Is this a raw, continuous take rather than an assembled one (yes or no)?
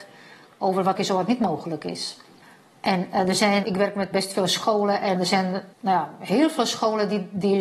no